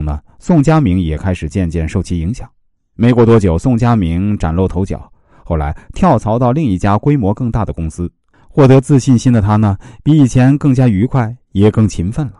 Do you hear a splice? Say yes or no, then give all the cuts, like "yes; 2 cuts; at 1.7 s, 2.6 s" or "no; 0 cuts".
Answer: yes; 1 cut; at 2.8 s